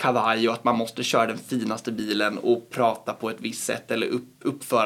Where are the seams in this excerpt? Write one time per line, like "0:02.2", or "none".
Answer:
none